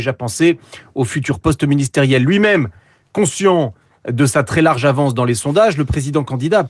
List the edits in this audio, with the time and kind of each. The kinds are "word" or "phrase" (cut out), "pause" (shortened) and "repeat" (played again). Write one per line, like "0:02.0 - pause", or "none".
none